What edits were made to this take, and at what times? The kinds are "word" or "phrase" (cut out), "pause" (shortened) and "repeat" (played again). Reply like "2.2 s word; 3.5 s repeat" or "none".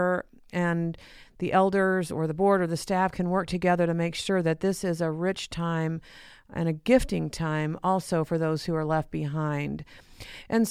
none